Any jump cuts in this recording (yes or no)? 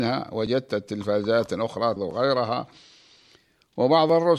yes